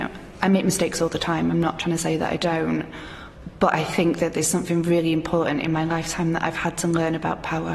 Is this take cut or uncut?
uncut